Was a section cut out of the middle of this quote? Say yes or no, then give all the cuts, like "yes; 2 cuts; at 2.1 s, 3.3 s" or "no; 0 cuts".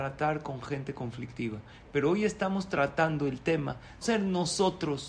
yes; 1 cut; at 4.0 s